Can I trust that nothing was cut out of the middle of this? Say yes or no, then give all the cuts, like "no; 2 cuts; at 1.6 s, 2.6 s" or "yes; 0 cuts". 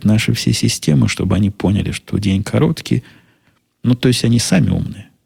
yes; 0 cuts